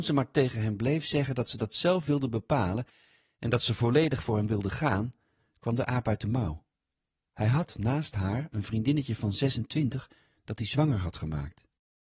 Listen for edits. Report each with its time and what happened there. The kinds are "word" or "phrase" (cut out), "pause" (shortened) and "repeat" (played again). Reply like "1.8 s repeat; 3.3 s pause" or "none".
none